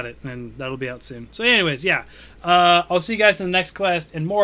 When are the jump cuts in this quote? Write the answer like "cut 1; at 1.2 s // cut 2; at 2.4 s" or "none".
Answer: none